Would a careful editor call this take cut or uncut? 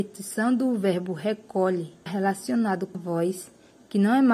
cut